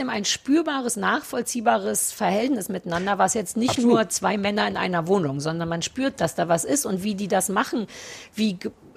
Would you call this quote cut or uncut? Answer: uncut